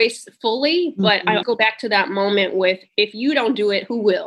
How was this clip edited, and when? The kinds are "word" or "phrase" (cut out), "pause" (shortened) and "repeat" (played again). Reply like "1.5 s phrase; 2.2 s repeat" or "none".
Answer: 1.4 s word